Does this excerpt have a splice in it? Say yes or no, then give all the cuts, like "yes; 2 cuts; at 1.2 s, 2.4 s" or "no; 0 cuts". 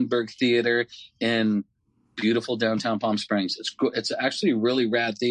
no; 0 cuts